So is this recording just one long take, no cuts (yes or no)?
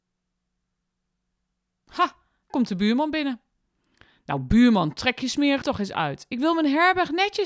no